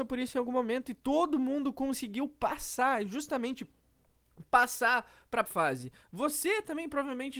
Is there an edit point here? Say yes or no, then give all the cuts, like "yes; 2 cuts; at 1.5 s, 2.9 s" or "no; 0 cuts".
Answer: yes; 1 cut; at 5.5 s